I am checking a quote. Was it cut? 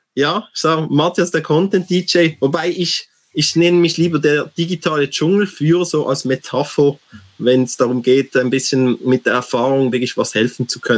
no; 0 cuts

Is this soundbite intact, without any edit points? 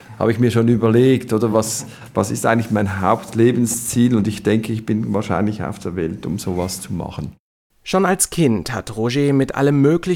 yes; 0 cuts

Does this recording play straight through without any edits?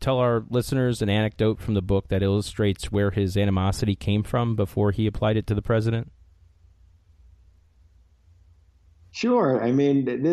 yes; 0 cuts

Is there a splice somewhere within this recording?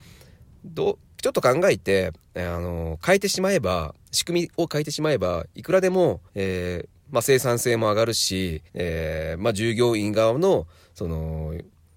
yes; 3 cuts; at 1.0 s, 6.3 s, 8.7 s

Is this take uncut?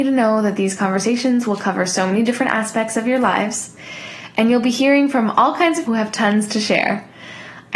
no; 1 cut; at 5.9 s

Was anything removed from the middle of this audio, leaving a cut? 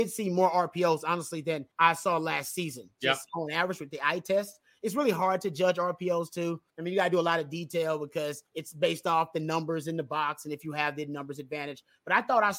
yes; 3 cuts; at 1.7 s, 6.7 s, 8.5 s

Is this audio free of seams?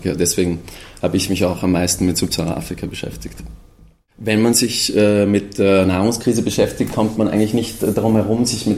yes; 0 cuts

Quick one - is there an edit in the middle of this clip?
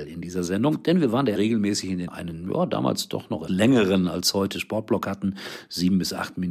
yes; 3 cuts; at 1.4 s, 2.1 s, 3.5 s

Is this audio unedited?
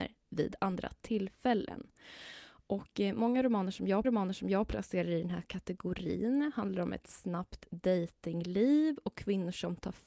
no; 1 cut; at 4.0 s

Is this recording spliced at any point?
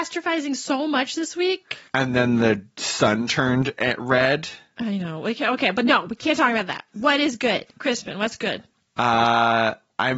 yes; 3 cuts; at 1.9 s, 6.9 s, 8.7 s

